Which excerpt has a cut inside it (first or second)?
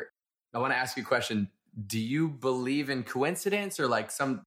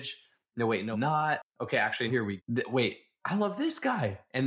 second